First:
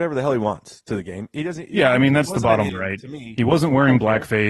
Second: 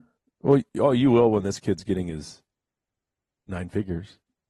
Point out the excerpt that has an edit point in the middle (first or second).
first